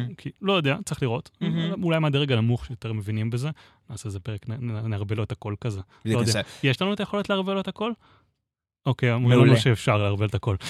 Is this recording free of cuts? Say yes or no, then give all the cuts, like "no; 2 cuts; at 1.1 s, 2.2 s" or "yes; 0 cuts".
yes; 0 cuts